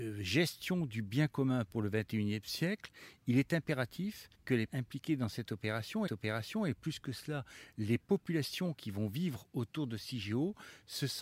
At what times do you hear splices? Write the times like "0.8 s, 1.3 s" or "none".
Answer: 4.3 s, 4.7 s, 6.1 s